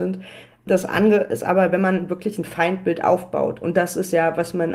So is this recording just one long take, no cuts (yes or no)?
yes